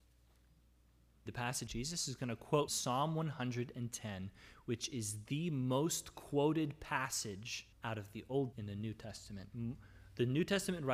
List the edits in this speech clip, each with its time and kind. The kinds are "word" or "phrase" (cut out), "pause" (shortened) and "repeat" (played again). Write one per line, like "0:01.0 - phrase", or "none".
0:01.3 - phrase
0:01.7 - phrase
0:02.7 - word
0:07.7 - pause
0:08.5 - word